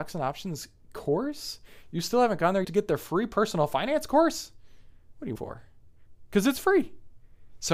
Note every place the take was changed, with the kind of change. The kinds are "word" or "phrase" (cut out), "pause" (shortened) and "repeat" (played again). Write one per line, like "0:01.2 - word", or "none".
0:02.6 - word
0:05.4 - word

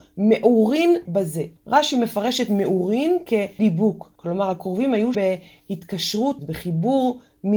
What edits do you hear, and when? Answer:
0:01.1 - word
0:01.6 - pause
0:03.6 - word
0:04.1 - pause
0:05.1 - word
0:06.4 - word

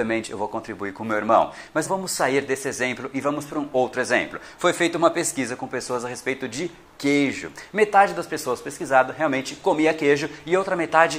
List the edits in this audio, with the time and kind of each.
0:01.8 - word

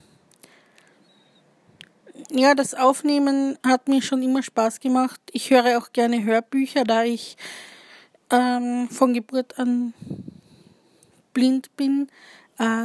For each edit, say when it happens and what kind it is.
0:03.6 - pause

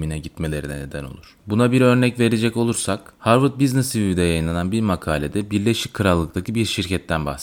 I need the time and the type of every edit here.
0:01.4 - pause
0:03.2 - pause

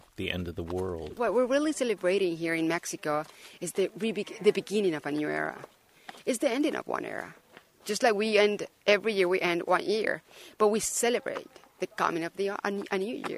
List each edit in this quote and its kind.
none

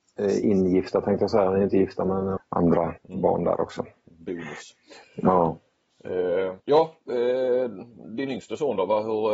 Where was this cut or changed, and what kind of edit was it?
0:02.4 - phrase
0:03.0 - pause
0:05.0 - pause
0:06.6 - pause

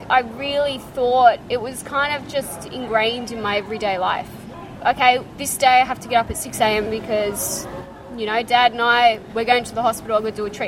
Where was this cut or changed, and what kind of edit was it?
none

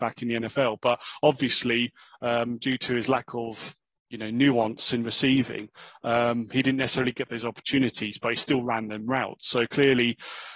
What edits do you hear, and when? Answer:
none

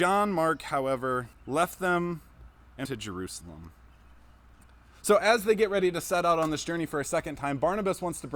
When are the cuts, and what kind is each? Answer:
0:01.3 - pause
0:02.8 - word

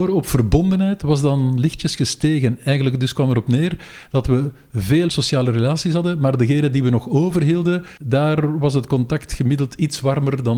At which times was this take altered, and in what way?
0:05.1 - word
0:08.0 - pause

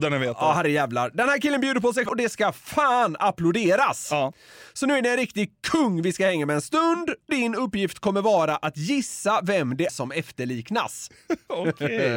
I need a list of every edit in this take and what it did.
0:02.1 - word
0:07.3 - word
0:09.9 - word

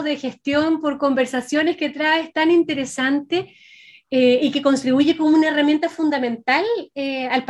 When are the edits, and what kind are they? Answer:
none

